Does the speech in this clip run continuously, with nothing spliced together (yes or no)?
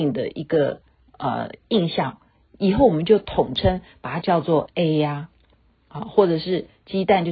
yes